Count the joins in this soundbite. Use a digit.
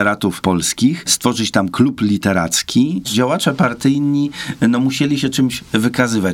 1